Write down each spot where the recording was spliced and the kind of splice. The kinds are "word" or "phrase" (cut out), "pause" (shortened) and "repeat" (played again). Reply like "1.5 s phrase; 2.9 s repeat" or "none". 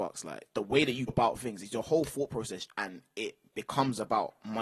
1.1 s word; 2.6 s word